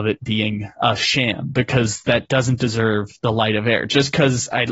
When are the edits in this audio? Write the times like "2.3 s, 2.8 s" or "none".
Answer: none